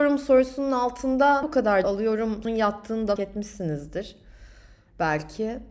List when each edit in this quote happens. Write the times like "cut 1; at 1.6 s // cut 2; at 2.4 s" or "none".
cut 1; at 1.4 s // cut 2; at 1.8 s // cut 3; at 2.4 s // cut 4; at 3.2 s